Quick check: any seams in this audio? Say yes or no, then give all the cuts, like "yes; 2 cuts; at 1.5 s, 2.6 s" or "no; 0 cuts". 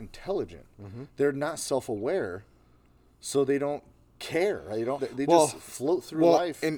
yes; 1 cut; at 5.0 s